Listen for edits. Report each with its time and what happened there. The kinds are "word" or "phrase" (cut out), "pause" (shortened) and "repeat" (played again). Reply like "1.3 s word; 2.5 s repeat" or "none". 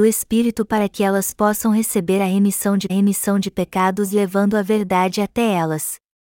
2.9 s repeat